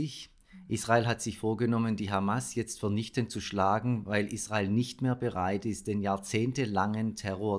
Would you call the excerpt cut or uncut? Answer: uncut